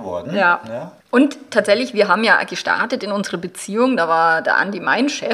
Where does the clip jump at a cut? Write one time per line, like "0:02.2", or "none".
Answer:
0:01.0